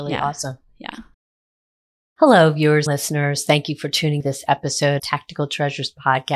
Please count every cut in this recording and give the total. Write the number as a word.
three